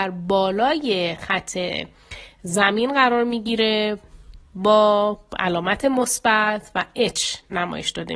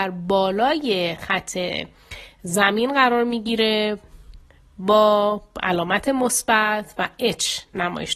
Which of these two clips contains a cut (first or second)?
first